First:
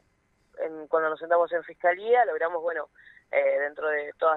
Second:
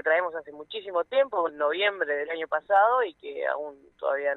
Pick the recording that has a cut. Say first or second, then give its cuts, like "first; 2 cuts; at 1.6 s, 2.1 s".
second; 1 cut; at 1.5 s